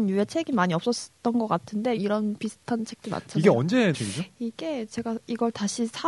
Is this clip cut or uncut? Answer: cut